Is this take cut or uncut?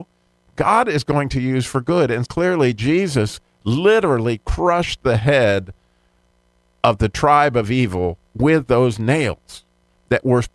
cut